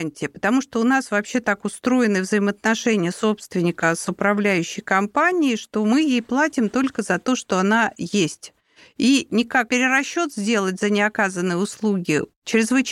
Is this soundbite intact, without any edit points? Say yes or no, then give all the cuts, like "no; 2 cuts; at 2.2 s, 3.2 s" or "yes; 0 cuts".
no; 1 cut; at 9.7 s